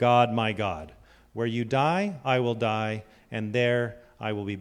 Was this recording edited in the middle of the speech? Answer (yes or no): no